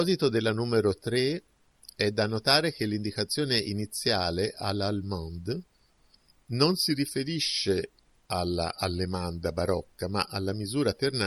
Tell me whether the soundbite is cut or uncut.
uncut